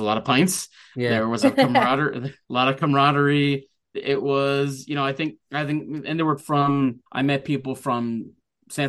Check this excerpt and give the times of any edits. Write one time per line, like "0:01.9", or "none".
0:01.4
0:02.4
0:03.9
0:05.4
0:06.4
0:07.1